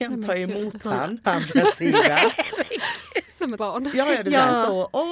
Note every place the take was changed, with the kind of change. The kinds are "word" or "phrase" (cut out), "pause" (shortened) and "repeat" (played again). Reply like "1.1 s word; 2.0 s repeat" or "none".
1.2 s word; 3.6 s word